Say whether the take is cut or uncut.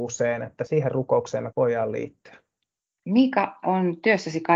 cut